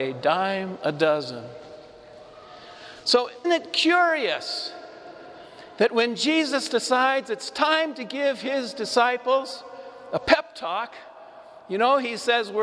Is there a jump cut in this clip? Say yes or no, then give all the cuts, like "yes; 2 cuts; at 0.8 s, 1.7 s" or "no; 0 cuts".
yes; 1 cut; at 3.4 s